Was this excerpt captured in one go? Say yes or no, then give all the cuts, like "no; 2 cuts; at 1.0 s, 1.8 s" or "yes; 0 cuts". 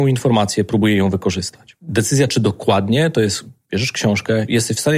yes; 0 cuts